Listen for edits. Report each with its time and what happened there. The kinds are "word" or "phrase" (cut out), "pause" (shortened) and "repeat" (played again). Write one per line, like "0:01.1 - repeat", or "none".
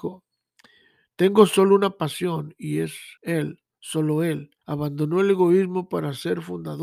0:03.2 - pause
0:04.6 - pause